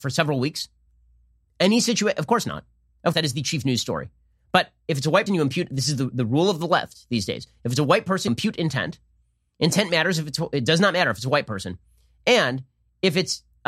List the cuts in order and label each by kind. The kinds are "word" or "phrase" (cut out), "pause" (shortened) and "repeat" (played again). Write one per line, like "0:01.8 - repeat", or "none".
0:03.1 - word
0:05.3 - word
0:08.3 - word